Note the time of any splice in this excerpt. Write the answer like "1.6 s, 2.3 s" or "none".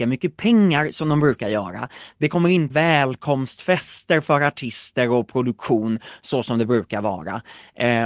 2.7 s